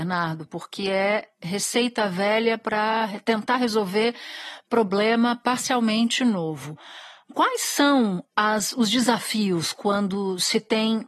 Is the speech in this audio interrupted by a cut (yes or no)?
no